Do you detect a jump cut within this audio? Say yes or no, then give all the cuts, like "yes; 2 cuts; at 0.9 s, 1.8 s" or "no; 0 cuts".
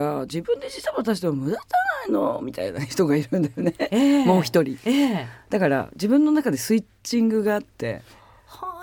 no; 0 cuts